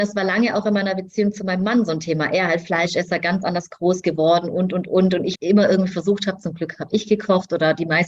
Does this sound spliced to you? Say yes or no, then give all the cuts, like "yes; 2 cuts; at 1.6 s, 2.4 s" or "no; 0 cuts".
yes; 1 cut; at 5.3 s